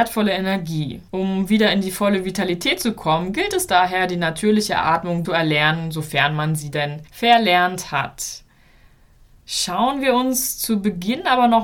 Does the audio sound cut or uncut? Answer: cut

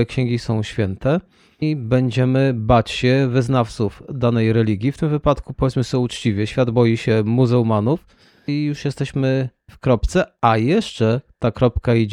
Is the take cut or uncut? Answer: uncut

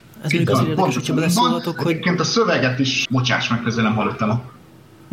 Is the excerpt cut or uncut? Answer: cut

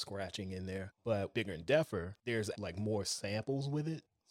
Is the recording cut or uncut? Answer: cut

